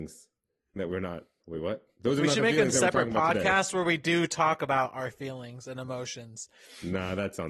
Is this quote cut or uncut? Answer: cut